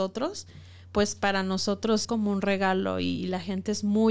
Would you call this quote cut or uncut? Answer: cut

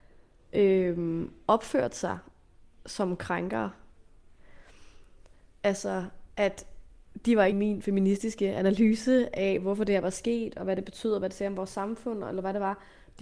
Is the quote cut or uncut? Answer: cut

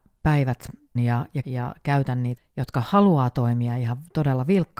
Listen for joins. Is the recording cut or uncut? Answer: cut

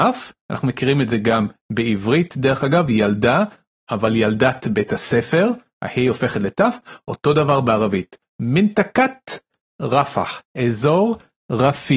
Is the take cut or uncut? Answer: uncut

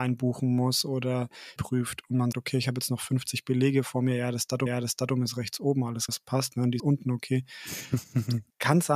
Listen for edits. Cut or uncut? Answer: cut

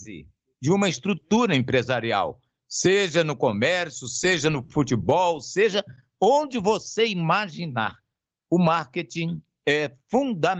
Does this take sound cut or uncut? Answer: uncut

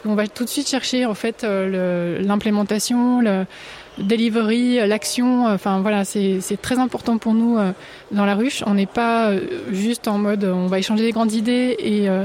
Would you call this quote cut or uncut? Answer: uncut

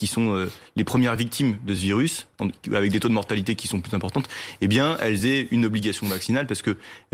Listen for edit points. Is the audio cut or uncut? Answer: uncut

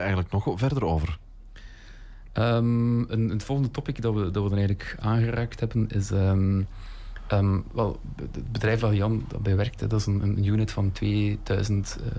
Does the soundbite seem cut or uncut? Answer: uncut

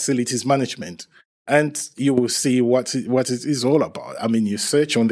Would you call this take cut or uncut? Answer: uncut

